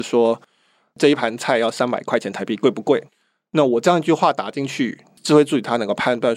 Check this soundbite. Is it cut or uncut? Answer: cut